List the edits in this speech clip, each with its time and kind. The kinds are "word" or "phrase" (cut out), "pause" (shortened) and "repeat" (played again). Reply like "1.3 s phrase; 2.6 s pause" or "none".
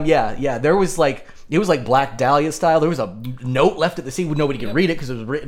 none